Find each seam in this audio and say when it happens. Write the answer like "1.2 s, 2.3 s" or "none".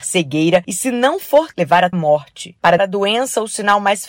1.5 s, 1.9 s, 2.8 s